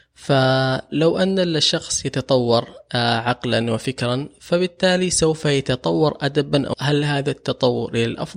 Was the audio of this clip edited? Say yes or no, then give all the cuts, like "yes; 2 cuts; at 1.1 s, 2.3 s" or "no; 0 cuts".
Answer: yes; 1 cut; at 6.7 s